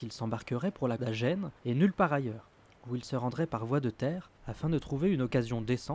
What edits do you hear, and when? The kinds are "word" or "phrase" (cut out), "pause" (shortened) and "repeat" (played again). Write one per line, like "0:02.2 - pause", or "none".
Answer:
0:01.0 - word
0:01.6 - pause
0:02.6 - pause
0:04.4 - pause